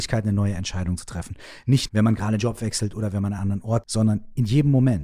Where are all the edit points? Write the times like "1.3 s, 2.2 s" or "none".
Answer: 1.9 s, 2.4 s, 3.4 s, 3.8 s